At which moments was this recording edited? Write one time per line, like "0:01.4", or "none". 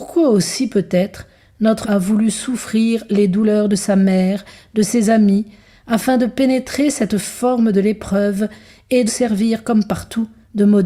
0:01.8
0:09.1